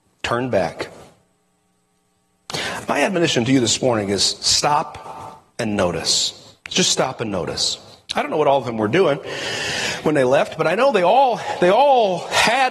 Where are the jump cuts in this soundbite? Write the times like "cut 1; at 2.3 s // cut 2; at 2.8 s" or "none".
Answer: cut 1; at 5.5 s // cut 2; at 6.6 s // cut 3; at 8.1 s